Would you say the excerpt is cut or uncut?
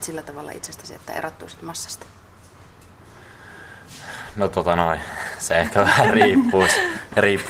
uncut